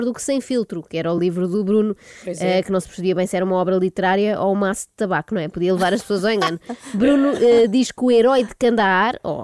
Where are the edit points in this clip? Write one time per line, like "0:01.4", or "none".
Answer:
none